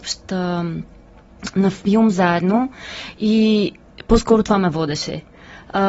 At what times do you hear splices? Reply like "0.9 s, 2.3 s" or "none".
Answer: none